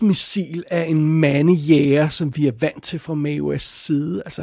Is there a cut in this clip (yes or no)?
no